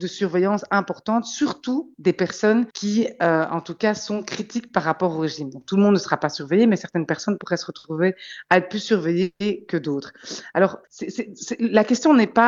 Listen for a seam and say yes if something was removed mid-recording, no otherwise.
yes